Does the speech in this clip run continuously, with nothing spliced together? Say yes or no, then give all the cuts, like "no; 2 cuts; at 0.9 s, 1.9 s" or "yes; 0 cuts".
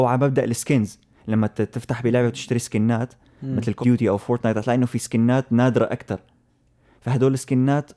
no; 1 cut; at 3.8 s